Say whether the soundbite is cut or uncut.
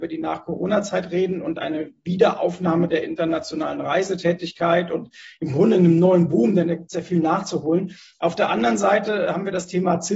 uncut